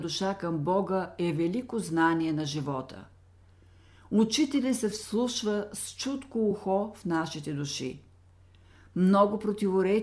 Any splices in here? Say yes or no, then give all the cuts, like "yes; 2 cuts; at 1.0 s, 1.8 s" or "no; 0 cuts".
no; 0 cuts